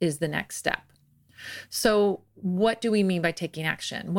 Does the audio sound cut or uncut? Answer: uncut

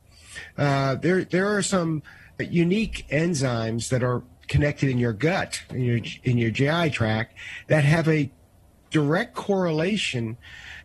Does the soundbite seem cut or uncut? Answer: cut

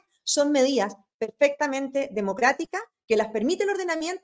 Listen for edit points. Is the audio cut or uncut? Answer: uncut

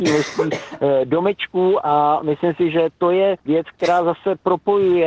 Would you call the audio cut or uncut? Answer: cut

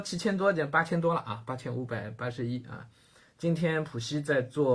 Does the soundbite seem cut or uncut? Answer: uncut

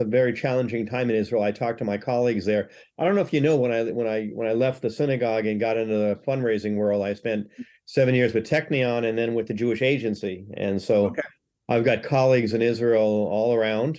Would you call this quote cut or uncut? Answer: uncut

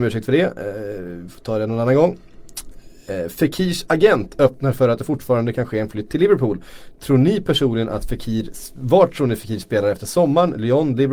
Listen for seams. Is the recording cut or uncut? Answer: uncut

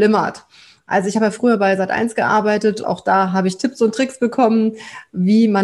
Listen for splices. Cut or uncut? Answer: cut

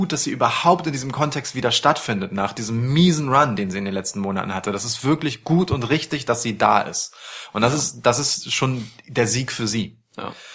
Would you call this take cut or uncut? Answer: uncut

